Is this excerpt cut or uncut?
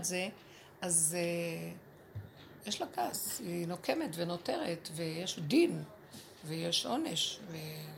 uncut